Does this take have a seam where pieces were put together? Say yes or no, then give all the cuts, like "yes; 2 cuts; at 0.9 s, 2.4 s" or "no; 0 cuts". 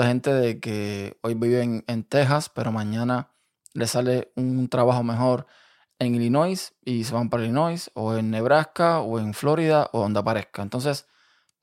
no; 0 cuts